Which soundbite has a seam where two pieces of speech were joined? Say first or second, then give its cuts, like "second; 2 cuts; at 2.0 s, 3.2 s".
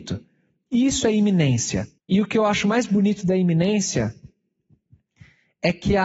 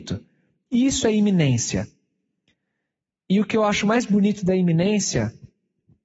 first; 1 cut; at 2.0 s